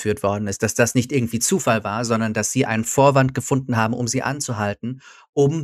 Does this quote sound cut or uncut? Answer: uncut